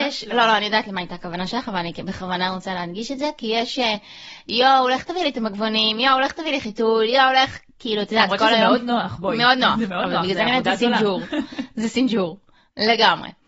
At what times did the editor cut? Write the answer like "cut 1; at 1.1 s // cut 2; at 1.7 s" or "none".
none